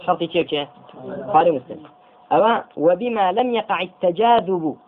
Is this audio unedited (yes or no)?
yes